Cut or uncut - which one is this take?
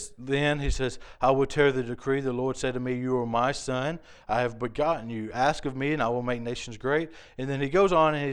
uncut